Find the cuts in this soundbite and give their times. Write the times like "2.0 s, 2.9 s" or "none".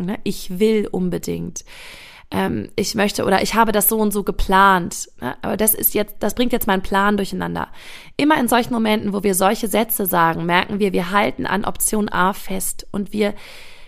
none